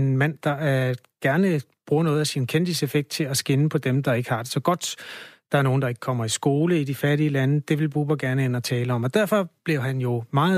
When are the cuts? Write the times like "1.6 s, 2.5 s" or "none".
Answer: none